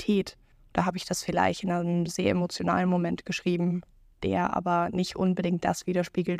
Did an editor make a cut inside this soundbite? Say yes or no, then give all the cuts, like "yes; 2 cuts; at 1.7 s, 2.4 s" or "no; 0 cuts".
no; 0 cuts